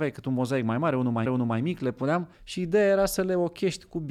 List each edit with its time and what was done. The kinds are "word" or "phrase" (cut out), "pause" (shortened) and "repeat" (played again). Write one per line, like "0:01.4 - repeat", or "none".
0:01.3 - repeat
0:02.3 - pause